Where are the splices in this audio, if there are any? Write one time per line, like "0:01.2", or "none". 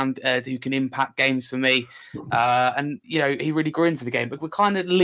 0:03.0